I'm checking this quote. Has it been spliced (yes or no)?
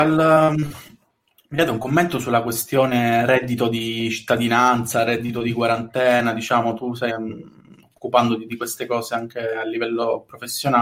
yes